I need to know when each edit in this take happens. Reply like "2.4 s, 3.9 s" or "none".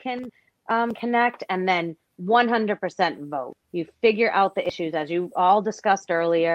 3.6 s